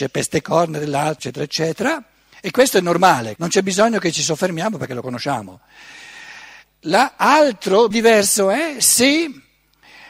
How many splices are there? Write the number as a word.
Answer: three